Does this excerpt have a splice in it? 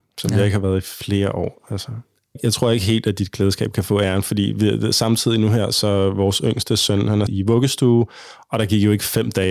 yes; 2 cuts; at 5.7 s, 7.3 s

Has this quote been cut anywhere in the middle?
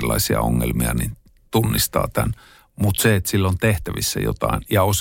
no; 0 cuts

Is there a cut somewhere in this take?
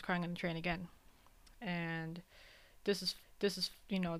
yes; 1 cut; at 3.2 s

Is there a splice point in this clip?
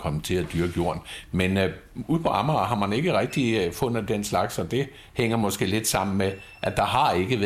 no; 0 cuts

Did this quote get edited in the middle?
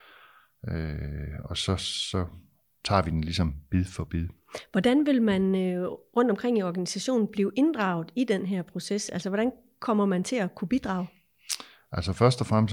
no; 0 cuts

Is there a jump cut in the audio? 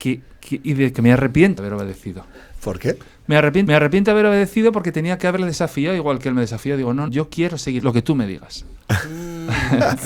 yes; 6 cuts; at 0.9 s, 1.6 s, 3.7 s, 7.1 s, 7.8 s, 8.8 s

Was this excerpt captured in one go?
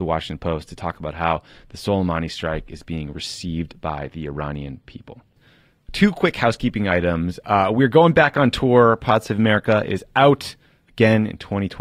yes; 0 cuts

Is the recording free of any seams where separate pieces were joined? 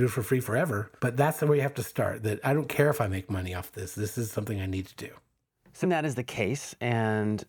no; 2 cuts; at 1.0 s, 5.8 s

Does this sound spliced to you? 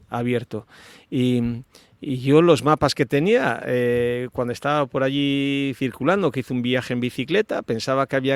no; 0 cuts

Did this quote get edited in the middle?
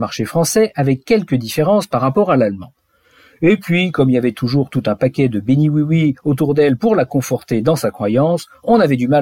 no; 0 cuts

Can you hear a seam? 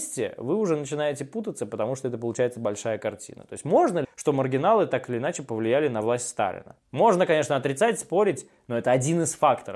yes; 1 cut; at 4.0 s

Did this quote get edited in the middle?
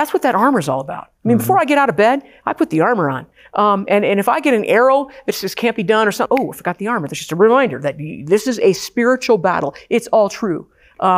yes; 1 cut; at 6.3 s

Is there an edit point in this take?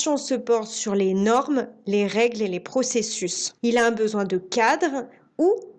yes; 1 cut; at 3.6 s

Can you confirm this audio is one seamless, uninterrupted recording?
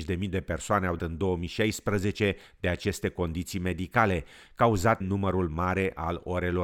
no; 2 cuts; at 1.0 s, 5.0 s

